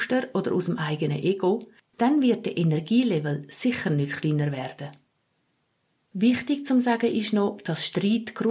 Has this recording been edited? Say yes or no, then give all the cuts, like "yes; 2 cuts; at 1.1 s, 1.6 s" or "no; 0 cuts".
no; 0 cuts